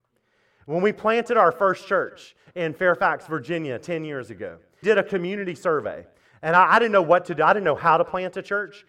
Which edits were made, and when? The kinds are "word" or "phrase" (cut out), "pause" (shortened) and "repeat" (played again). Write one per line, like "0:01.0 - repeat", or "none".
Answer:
0:04.8 - word